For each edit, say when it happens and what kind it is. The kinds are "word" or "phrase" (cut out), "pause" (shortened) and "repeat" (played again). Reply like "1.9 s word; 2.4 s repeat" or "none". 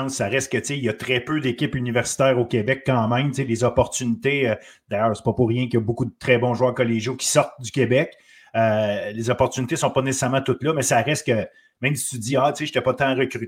none